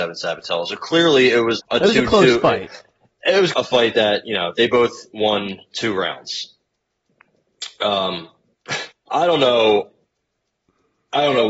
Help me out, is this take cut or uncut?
cut